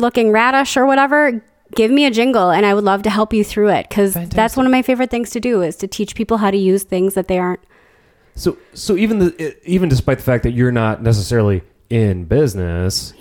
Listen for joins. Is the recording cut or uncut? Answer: uncut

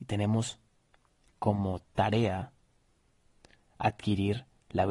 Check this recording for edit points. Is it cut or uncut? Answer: uncut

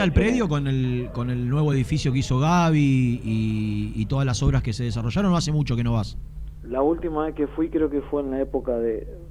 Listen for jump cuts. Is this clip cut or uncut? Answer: uncut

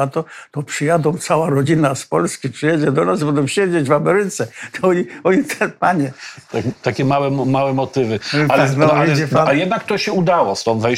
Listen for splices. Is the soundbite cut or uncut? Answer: uncut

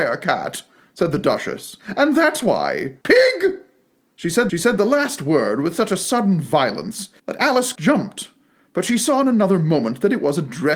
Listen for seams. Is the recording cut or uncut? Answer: cut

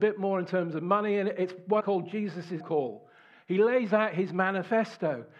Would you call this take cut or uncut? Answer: cut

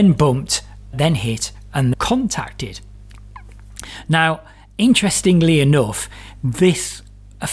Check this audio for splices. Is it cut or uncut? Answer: cut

